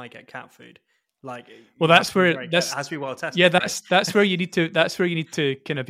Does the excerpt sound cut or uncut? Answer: uncut